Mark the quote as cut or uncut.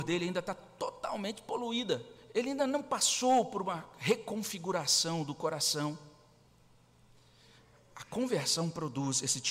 uncut